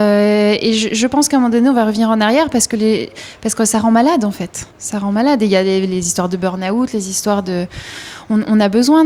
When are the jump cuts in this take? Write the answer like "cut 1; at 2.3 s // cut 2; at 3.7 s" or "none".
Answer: cut 1; at 4.7 s